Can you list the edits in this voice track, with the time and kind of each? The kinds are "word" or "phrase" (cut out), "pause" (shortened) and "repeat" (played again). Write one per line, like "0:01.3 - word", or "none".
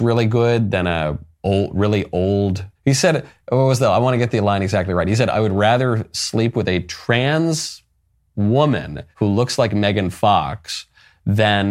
0:01.3 - pause
0:02.7 - pause
0:09.1 - pause